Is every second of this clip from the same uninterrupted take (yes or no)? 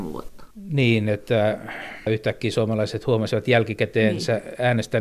yes